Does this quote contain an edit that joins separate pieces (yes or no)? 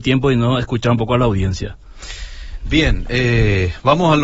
no